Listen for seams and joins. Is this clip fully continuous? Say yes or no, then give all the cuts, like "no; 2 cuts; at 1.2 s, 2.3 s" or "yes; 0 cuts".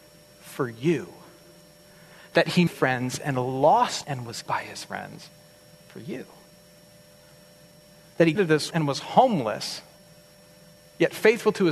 no; 5 cuts; at 2.7 s, 4.0 s, 4.5 s, 8.4 s, 8.7 s